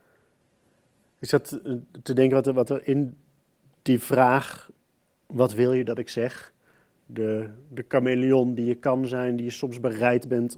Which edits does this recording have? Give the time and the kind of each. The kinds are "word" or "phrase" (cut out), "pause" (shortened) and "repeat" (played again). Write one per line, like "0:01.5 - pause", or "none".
none